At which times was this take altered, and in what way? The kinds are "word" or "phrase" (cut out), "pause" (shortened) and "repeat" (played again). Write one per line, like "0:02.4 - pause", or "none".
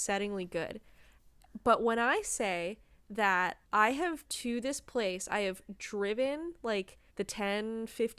0:03.6 - pause
0:04.2 - word
0:07.1 - pause